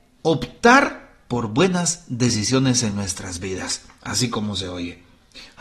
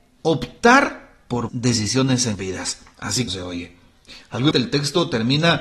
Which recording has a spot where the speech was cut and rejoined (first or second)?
second